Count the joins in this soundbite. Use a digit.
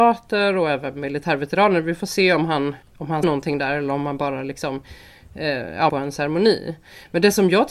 3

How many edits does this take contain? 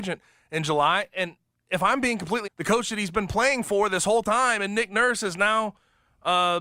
1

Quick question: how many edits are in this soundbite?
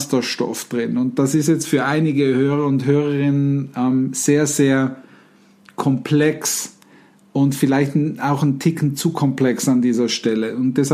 0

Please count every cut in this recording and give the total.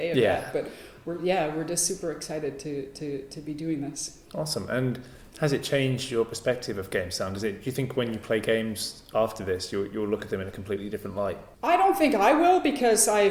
3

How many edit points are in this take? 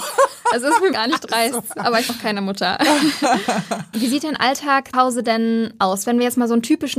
4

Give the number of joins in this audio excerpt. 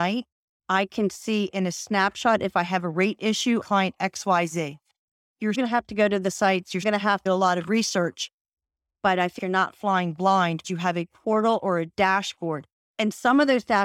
6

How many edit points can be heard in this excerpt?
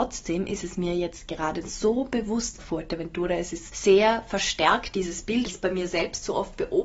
3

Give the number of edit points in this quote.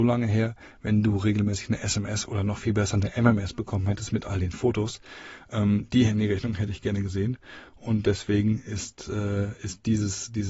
0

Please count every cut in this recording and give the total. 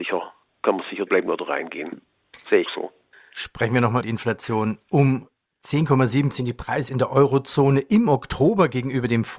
5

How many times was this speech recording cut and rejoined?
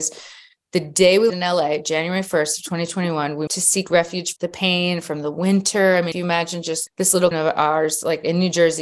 6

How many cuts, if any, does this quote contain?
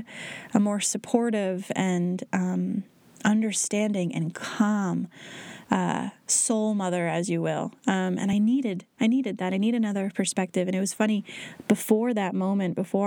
0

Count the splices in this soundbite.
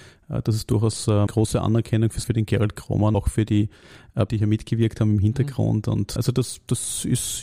5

